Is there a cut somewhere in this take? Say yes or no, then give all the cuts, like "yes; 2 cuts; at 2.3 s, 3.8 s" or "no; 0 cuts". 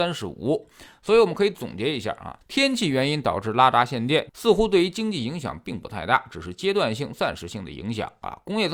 yes; 1 cut; at 2.4 s